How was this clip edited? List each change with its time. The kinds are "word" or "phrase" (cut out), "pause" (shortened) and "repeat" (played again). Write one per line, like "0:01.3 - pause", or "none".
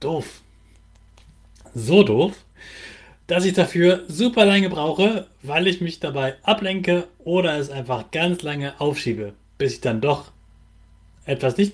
none